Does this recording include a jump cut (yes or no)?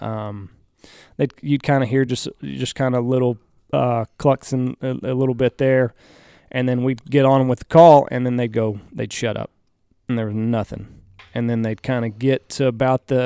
no